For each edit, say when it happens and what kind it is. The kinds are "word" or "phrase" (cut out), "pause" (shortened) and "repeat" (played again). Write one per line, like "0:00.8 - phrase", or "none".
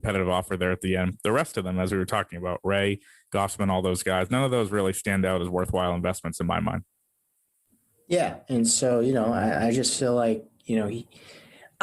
none